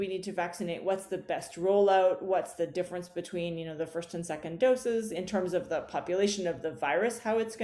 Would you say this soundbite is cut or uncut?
uncut